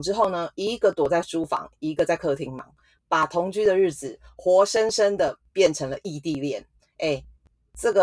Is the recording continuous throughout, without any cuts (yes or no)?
yes